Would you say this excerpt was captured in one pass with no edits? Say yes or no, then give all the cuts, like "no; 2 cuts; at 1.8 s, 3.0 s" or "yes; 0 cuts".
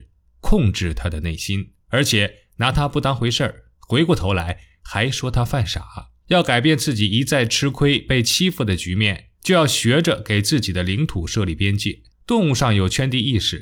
no; 5 cuts; at 1.8 s, 3.7 s, 6.2 s, 9.3 s, 12.1 s